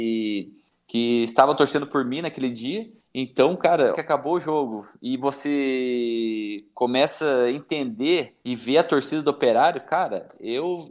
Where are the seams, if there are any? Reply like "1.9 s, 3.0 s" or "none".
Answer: 3.9 s, 8.4 s